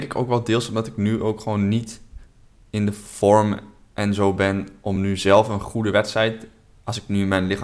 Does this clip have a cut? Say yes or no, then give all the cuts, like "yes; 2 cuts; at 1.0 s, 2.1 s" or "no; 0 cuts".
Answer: no; 0 cuts